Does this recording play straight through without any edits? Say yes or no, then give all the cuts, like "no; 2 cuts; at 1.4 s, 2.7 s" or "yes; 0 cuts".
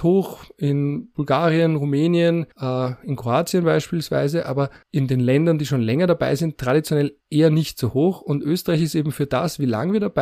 no; 3 cuts; at 2.5 s, 4.8 s, 7.2 s